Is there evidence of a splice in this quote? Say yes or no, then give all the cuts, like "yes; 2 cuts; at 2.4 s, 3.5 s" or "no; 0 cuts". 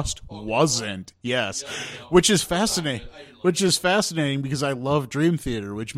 no; 0 cuts